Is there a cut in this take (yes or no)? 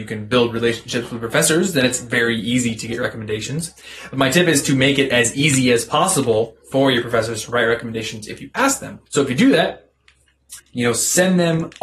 yes